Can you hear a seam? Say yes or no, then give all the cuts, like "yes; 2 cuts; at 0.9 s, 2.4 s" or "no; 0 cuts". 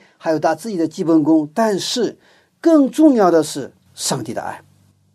no; 0 cuts